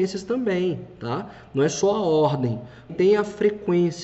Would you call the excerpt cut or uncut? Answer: cut